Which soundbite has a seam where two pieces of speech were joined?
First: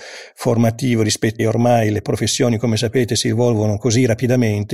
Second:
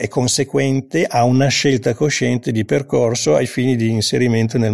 first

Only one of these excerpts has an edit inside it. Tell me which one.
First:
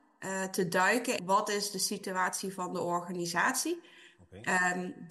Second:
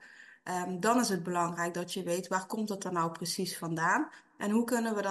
first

